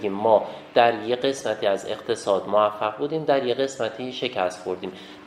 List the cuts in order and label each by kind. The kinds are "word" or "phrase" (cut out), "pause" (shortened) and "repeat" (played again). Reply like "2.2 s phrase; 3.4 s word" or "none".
none